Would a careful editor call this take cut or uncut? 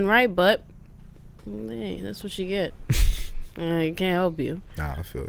uncut